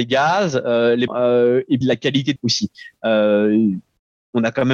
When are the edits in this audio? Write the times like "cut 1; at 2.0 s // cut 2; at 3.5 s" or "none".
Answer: cut 1; at 1.1 s // cut 2; at 1.8 s // cut 3; at 2.4 s